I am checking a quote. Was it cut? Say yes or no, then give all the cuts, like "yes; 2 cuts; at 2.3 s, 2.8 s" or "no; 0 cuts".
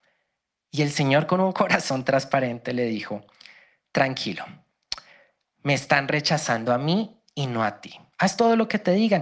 no; 0 cuts